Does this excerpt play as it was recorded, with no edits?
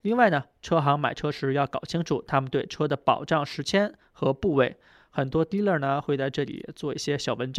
yes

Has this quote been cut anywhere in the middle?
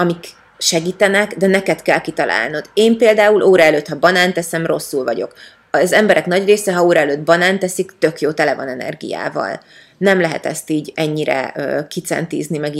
no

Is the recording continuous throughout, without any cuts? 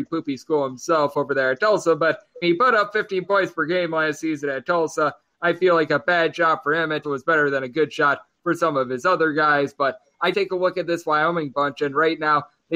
no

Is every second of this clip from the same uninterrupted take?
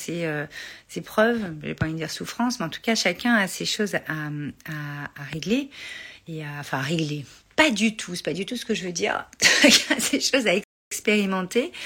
yes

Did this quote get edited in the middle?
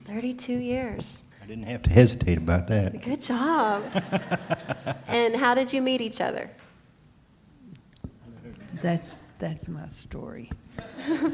yes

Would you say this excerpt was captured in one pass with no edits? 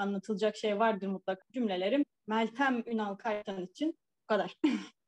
no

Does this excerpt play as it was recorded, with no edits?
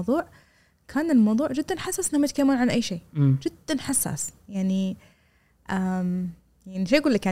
yes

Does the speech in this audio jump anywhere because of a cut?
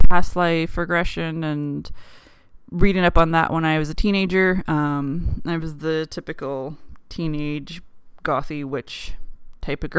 no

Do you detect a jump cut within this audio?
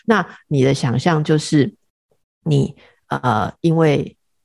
no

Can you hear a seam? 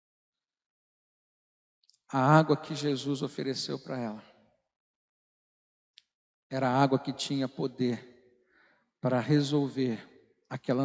no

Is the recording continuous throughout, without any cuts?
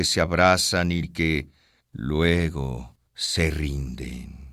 no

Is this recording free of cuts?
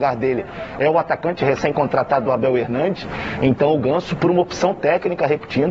yes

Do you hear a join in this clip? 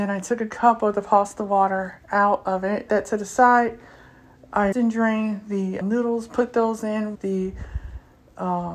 yes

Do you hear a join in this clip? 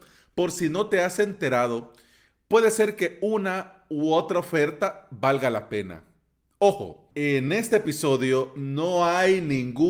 no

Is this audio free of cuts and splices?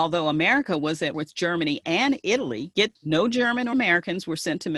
no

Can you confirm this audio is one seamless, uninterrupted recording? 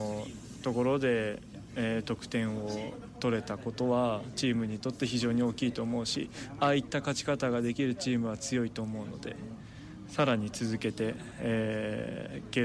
yes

